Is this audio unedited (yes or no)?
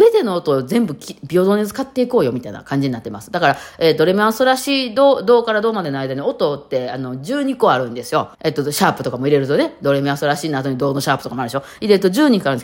no